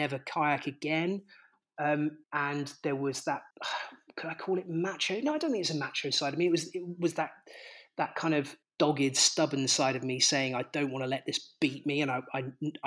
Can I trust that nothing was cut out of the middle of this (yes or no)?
no